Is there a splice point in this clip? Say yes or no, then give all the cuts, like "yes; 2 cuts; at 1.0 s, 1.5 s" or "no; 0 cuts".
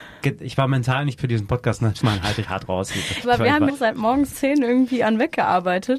yes; 6 cuts; at 1.2 s, 2.0 s, 2.4 s, 3.2 s, 3.7 s, 4.3 s